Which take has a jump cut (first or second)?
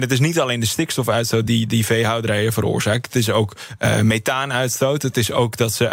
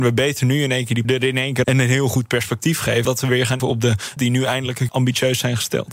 second